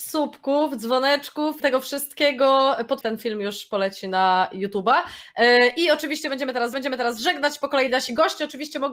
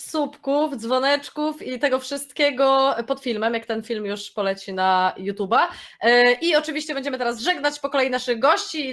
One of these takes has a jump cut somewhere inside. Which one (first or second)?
first